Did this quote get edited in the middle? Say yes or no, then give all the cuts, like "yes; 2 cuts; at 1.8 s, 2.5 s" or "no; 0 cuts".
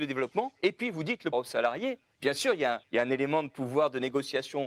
yes; 2 cuts; at 1.3 s, 2.8 s